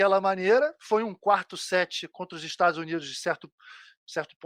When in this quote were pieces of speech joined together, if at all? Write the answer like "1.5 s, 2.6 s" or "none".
none